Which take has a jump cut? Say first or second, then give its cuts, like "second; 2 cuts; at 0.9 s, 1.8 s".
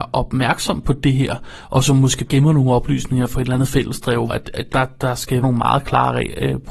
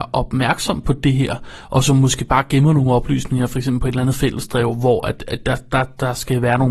first; 5 cuts; at 2.3 s, 3.3 s, 4.3 s, 4.7 s, 5.4 s